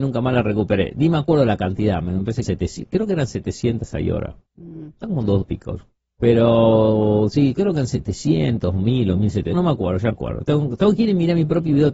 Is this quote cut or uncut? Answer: cut